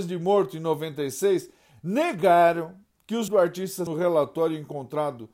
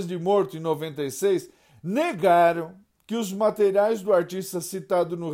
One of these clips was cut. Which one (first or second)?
first